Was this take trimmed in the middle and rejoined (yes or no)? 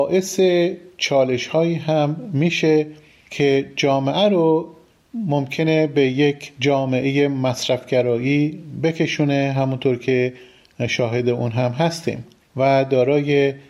no